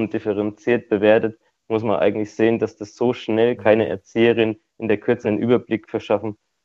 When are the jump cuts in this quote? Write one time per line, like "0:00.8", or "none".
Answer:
0:03.6
0:05.2